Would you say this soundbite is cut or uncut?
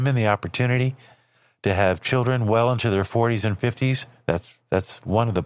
uncut